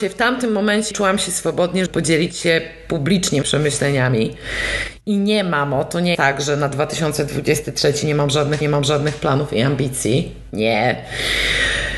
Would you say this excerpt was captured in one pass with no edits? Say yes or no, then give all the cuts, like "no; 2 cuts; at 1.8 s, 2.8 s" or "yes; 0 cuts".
no; 5 cuts; at 0.9 s, 1.9 s, 3.4 s, 6.1 s, 8.6 s